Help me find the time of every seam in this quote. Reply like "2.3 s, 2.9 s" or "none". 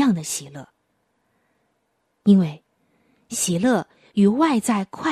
none